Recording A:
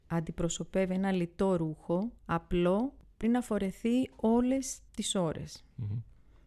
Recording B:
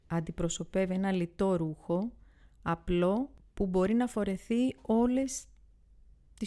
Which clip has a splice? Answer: A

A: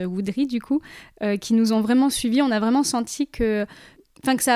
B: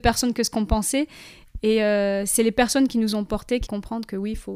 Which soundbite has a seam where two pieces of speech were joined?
B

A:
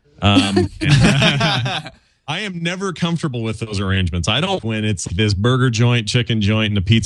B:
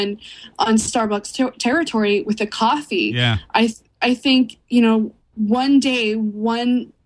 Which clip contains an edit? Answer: A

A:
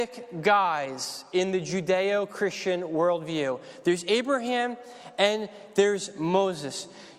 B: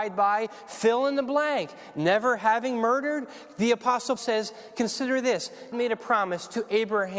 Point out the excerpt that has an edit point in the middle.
B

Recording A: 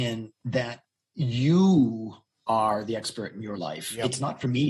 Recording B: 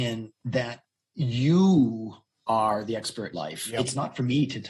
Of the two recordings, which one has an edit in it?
B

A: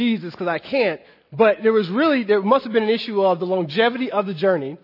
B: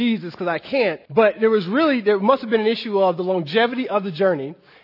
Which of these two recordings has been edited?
B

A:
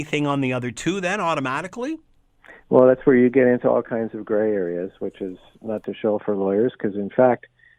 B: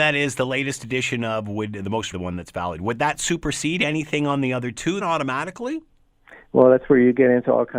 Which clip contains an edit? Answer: B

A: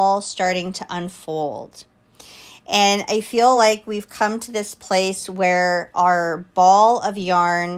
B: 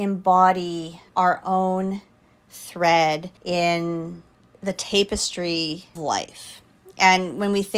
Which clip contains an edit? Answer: B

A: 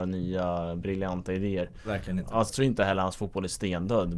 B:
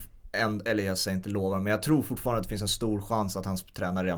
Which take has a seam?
A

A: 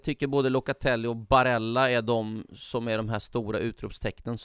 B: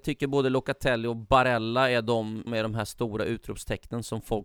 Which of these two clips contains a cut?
B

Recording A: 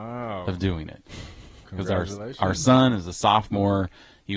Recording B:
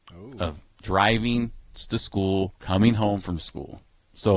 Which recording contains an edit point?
B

